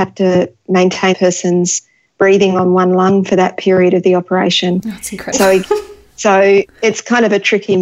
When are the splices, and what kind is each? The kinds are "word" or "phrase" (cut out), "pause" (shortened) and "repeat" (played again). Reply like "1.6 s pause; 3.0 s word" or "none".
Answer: 1.1 s word; 5.3 s word